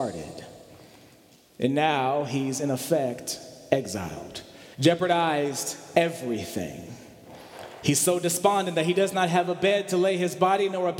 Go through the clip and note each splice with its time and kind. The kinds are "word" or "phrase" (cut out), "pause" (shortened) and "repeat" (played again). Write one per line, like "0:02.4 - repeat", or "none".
0:04.7 - pause